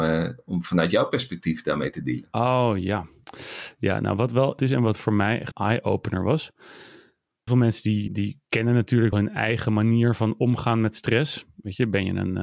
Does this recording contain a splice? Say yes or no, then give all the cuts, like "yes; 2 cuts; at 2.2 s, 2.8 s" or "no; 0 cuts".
yes; 5 cuts; at 4.6 s, 5.5 s, 7.5 s, 8.1 s, 9.1 s